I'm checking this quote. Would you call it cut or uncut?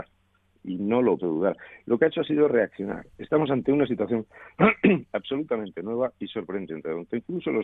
cut